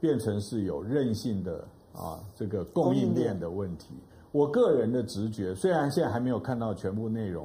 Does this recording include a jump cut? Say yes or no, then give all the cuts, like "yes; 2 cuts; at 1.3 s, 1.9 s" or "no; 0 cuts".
yes; 1 cut; at 4.1 s